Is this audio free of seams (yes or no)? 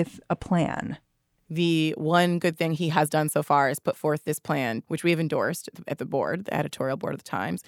yes